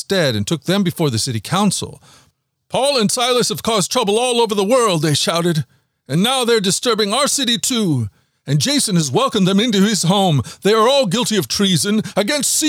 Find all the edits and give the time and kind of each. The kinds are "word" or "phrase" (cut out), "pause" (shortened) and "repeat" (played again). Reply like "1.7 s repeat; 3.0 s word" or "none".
none